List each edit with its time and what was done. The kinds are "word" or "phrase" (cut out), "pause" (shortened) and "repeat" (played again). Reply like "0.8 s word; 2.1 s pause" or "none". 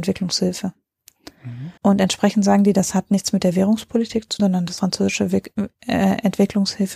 1.8 s pause; 4.4 s word; 4.8 s word

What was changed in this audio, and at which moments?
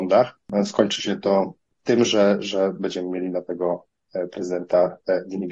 none

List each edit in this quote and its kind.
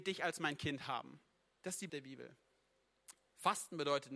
1.9 s word

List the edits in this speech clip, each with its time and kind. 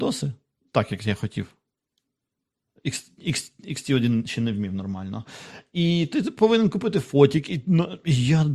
none

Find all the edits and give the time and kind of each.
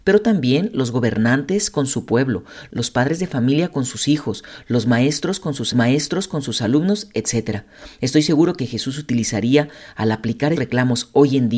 5.7 s repeat; 8.6 s phrase; 10.6 s word

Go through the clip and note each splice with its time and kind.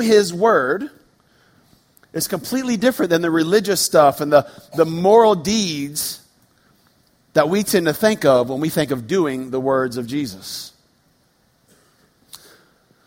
none

